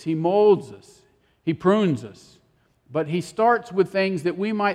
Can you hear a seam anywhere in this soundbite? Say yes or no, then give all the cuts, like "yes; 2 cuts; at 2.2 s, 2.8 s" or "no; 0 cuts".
no; 0 cuts